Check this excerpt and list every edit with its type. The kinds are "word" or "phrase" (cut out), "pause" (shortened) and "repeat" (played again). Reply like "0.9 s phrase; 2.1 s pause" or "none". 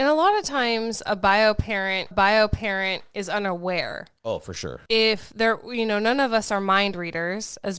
2.1 s repeat; 4.2 s pause; 4.9 s word